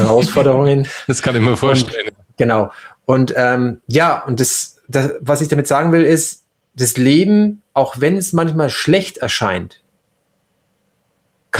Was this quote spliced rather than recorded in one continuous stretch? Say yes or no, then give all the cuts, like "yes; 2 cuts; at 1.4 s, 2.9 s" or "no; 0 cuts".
no; 0 cuts